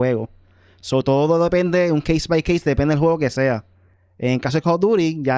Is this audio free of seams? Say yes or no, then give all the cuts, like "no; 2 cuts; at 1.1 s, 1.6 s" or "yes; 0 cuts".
yes; 0 cuts